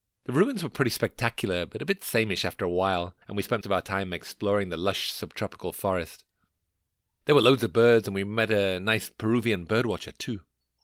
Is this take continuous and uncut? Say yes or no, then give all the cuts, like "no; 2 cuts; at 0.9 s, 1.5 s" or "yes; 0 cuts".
no; 2 cuts; at 3.2 s, 3.6 s